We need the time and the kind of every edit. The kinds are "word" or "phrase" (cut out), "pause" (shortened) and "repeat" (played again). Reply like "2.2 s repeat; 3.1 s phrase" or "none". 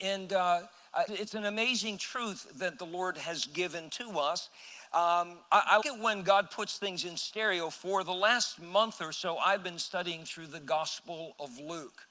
1.1 s word; 5.8 s word